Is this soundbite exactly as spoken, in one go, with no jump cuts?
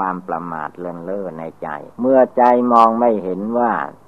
no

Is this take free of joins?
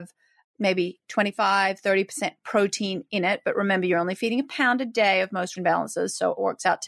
no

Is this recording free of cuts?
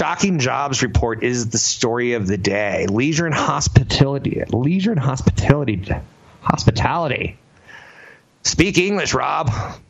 yes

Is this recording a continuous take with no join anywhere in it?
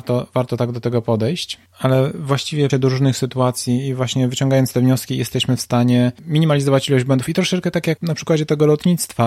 no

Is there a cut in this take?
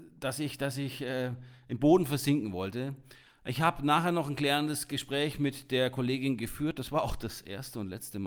no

